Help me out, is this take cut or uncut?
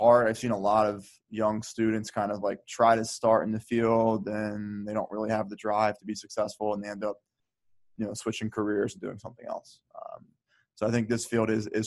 uncut